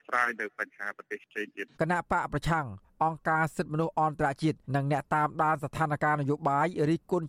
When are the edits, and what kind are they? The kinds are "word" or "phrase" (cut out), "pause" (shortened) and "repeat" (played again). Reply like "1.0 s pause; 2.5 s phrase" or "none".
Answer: 1.7 s pause; 4.6 s pause